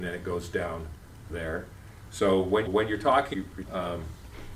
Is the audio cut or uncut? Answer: cut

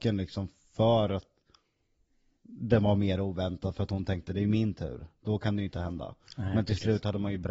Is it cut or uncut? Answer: uncut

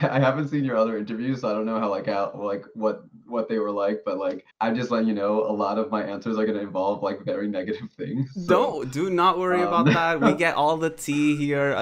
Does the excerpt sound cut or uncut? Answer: cut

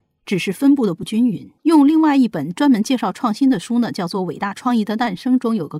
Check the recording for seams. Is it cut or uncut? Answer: cut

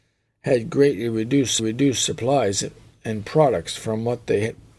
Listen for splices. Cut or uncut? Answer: cut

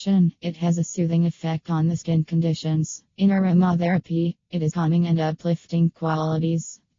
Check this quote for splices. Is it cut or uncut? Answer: cut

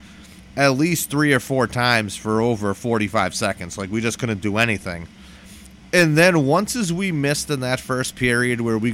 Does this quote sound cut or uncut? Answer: uncut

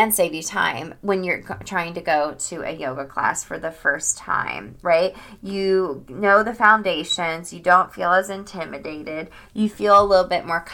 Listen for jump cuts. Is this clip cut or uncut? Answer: uncut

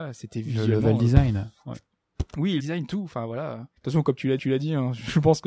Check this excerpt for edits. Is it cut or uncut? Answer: cut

